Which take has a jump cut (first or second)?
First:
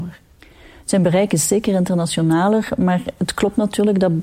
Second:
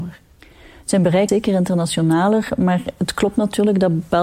second